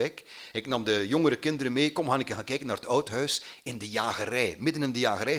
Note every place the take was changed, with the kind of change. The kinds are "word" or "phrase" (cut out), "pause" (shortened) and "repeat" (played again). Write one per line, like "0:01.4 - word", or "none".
none